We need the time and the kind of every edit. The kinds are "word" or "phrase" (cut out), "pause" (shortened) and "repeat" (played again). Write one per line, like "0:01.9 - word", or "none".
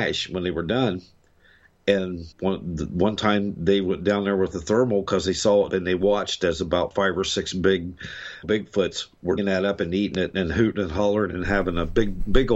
0:02.3 - pause
0:05.7 - phrase
0:08.4 - word
0:09.4 - word